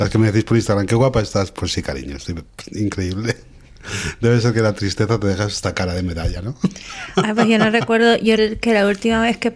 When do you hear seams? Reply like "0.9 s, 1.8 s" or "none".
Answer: 8.4 s